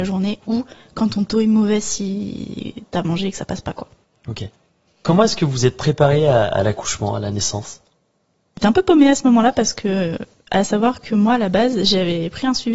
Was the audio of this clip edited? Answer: no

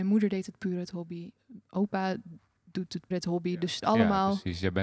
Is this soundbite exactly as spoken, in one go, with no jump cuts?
no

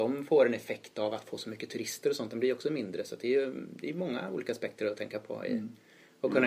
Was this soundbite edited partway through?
no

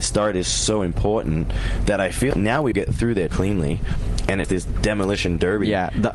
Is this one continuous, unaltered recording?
no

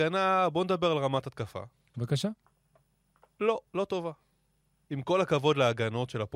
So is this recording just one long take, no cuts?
no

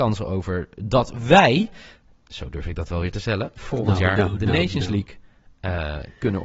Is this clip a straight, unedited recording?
yes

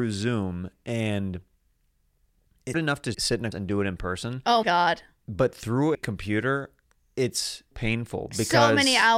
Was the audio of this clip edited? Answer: yes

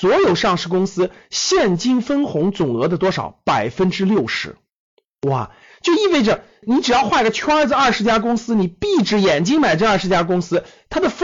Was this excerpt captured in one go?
yes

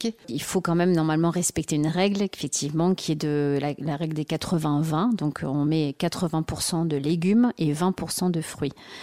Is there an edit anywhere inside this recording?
no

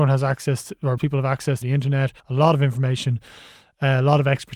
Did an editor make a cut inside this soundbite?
yes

